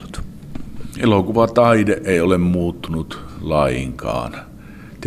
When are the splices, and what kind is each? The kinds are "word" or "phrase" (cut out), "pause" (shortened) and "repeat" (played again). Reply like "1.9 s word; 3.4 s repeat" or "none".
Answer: none